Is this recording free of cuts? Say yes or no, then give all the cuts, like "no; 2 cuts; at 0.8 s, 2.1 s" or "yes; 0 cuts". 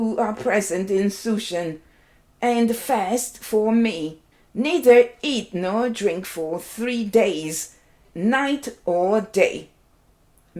yes; 0 cuts